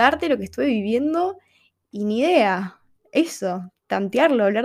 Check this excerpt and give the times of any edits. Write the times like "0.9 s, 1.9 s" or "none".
none